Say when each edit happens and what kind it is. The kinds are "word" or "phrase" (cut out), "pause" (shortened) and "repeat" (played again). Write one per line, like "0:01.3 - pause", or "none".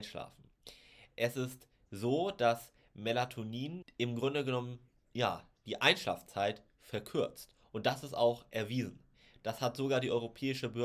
0:03.8 - word
0:05.0 - pause